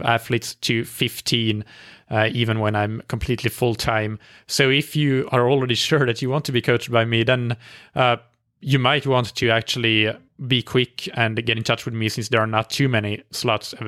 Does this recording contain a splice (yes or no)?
no